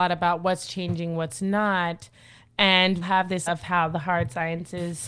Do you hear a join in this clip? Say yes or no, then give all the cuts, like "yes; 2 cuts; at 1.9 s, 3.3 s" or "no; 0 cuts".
yes; 2 cuts; at 3.0 s, 3.5 s